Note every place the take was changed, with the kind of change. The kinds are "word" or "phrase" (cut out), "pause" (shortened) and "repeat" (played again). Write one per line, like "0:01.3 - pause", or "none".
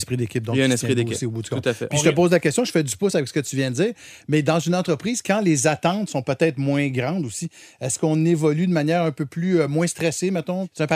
none

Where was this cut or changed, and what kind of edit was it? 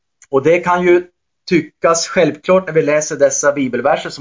none

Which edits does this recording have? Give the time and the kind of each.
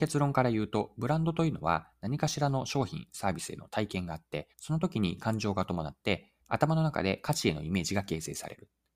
0:04.5 - pause
0:06.4 - pause

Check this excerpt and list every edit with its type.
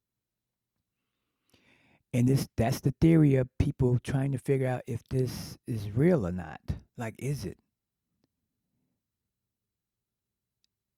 0:06.9 - pause

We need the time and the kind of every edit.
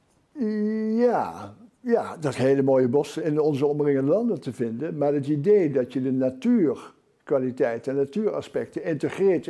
0:02.3 - phrase
0:03.2 - word

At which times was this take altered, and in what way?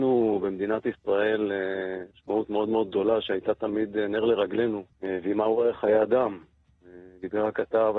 0:02.1 - pause
0:04.9 - pause

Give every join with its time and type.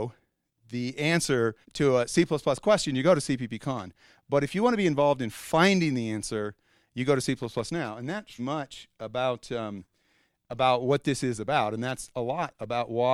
0:01.6 - pause
0:08.4 - word

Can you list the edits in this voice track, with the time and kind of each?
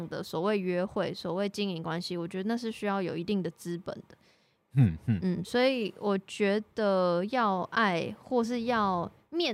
none

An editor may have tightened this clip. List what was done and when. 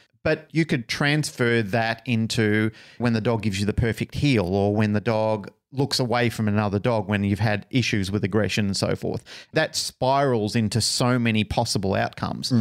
none

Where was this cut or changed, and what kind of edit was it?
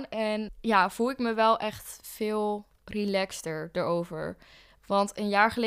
none

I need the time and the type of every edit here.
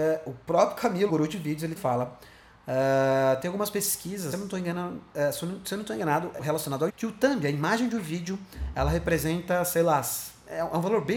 0:01.1 - word
0:01.8 - word
0:04.3 - word
0:06.4 - word
0:06.9 - word

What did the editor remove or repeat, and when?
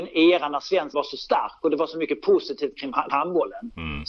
0:00.9 - word
0:03.1 - word

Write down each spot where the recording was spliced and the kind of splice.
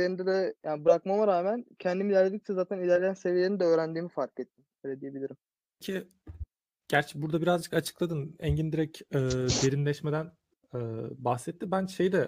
none

